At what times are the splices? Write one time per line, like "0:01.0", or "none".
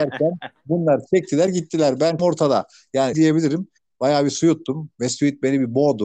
0:02.2
0:03.1